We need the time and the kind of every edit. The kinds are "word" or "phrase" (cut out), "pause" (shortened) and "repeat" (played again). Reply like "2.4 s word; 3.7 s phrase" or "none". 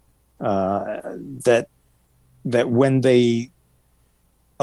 none